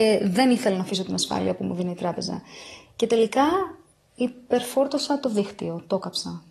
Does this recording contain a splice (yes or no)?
no